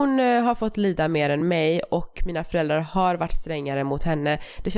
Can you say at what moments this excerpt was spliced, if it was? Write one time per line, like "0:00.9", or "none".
none